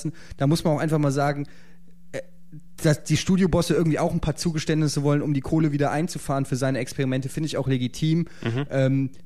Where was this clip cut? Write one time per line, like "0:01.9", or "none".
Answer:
none